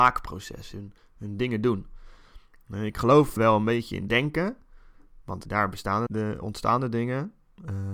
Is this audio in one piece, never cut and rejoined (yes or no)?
no